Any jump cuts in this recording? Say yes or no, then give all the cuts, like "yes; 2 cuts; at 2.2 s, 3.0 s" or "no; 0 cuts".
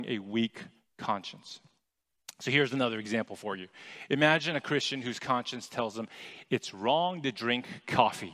no; 0 cuts